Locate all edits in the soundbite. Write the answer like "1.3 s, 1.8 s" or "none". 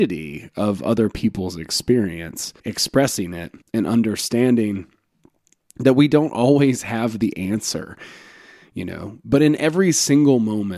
2.6 s, 3.6 s